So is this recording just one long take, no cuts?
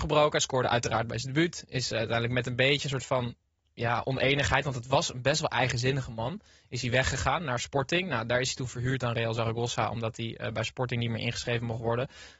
yes; 0 cuts

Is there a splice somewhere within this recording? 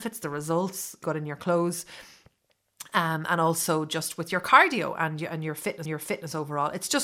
yes; 2 cuts; at 1.0 s, 5.9 s

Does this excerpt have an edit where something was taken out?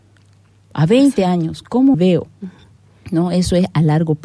yes; 1 cut; at 1.9 s

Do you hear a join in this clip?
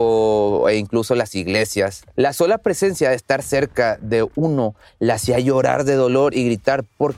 no; 0 cuts

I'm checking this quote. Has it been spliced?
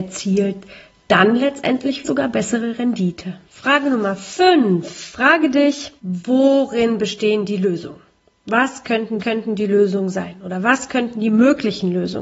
yes; 4 cuts; at 2.0 s, 3.5 s, 6.0 s, 9.2 s

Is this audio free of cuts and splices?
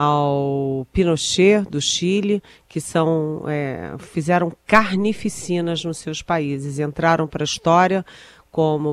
yes; 0 cuts

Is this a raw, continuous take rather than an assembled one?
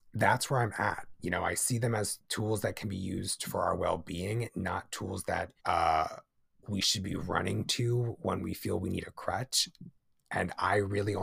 no; 2 cuts; at 2.2 s, 5.6 s

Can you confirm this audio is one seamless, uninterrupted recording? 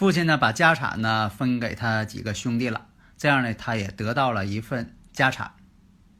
yes; 0 cuts

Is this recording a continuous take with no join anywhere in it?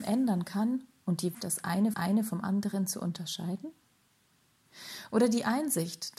no; 2 cuts; at 1.3 s, 1.9 s

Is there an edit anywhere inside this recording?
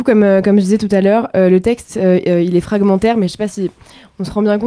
no; 0 cuts

